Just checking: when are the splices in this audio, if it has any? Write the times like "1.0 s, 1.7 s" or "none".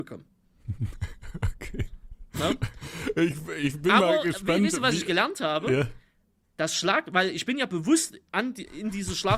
8.3 s